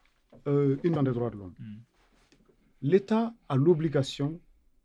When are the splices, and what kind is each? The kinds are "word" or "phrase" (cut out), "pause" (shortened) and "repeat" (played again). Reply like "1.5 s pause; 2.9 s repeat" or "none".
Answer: 1.0 s word